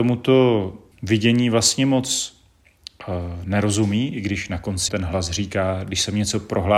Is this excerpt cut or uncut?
cut